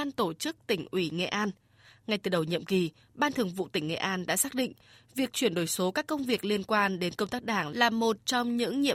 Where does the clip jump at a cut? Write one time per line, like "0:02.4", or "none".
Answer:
none